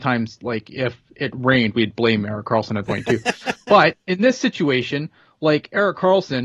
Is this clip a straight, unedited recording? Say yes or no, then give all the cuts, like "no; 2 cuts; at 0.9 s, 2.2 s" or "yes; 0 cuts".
no; 2 cuts; at 1.7 s, 2.8 s